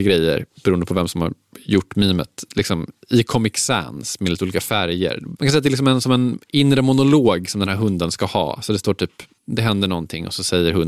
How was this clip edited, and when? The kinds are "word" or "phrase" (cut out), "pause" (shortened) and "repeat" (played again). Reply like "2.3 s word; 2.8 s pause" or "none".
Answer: 9.4 s pause